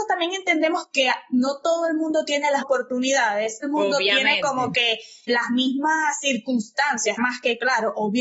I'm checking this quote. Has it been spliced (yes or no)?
yes